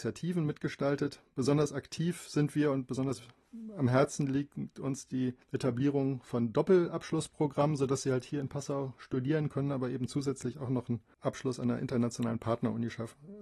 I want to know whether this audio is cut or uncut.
cut